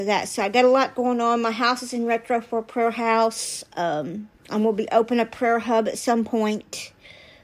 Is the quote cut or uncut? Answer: cut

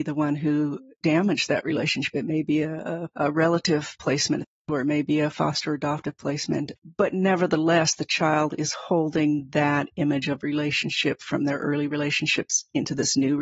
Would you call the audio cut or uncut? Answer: cut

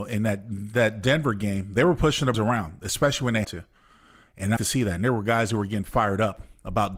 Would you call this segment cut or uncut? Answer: cut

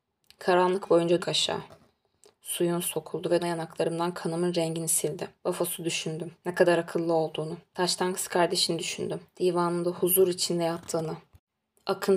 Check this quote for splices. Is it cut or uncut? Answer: cut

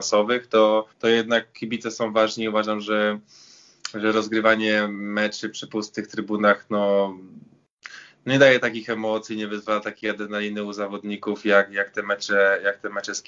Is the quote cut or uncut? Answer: cut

